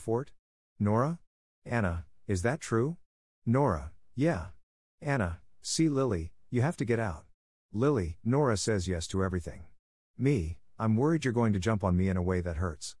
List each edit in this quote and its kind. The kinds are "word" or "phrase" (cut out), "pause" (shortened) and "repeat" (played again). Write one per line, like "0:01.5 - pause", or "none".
0:08.2 - word

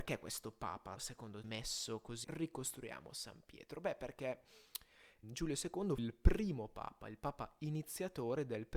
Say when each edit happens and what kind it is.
0:01.0 - word
0:01.4 - phrase
0:02.2 - phrase
0:05.2 - word
0:06.0 - word

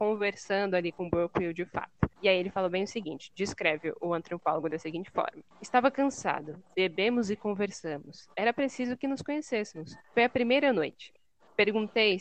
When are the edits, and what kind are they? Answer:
0:02.1 - pause
0:05.5 - pause
0:10.0 - pause

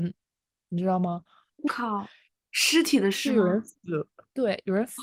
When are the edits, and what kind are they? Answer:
0:01.7 - word

